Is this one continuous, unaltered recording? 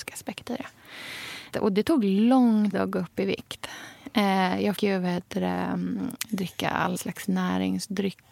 no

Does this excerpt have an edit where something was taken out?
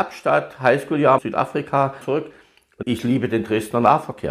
yes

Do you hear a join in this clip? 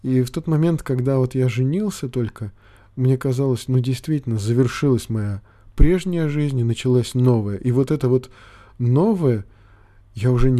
no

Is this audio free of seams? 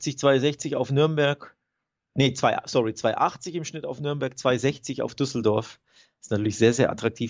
yes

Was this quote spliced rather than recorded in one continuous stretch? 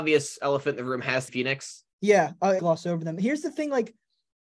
yes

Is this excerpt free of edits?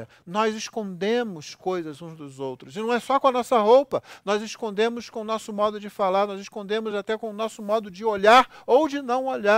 yes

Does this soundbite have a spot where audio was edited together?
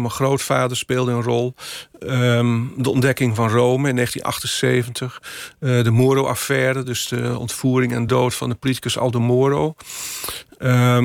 no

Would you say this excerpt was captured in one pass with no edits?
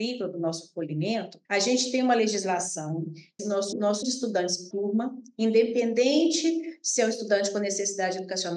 no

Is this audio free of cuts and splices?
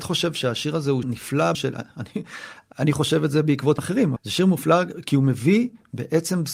no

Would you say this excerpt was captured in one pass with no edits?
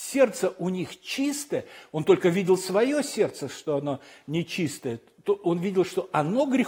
yes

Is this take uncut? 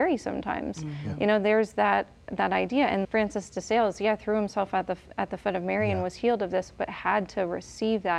no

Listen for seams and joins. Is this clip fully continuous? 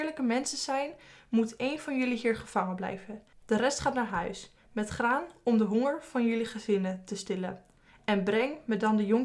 yes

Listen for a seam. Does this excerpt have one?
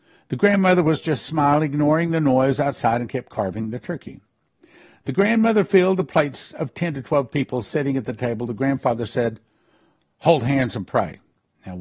no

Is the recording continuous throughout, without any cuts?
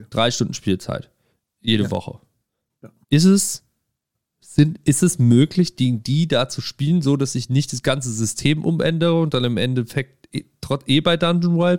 no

